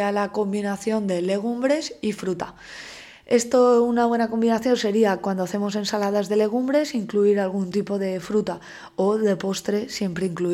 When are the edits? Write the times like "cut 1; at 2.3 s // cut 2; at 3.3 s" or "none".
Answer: none